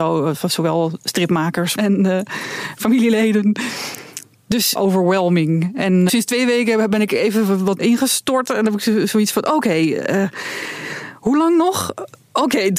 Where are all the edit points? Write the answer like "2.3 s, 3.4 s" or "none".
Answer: 1.8 s, 4.8 s, 6.1 s, 7.8 s